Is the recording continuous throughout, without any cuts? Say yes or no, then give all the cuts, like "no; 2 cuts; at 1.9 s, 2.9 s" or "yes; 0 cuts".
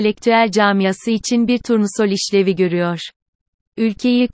yes; 0 cuts